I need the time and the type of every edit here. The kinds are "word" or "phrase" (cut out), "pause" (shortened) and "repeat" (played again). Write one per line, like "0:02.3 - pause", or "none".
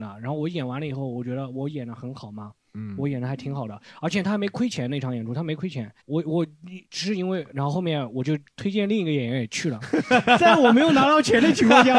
0:06.0 - pause
0:06.8 - pause